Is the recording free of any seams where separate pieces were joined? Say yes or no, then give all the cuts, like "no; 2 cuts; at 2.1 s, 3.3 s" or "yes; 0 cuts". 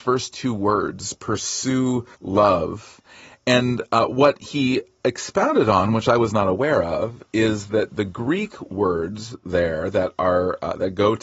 no; 1 cut; at 2.1 s